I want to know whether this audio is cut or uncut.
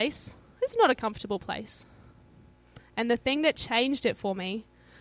uncut